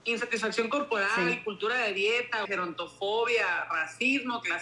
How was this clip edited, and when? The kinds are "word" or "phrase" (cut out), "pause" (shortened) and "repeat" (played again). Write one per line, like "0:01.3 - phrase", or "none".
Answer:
0:02.4 - word